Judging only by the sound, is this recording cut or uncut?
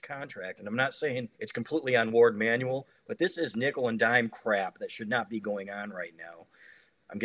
cut